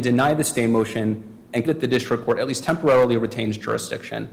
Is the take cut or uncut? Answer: cut